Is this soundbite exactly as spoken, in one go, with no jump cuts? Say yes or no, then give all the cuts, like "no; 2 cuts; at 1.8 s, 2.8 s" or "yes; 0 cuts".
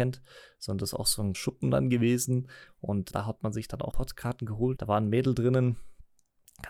no; 4 cuts; at 1.3 s, 3.1 s, 3.9 s, 4.8 s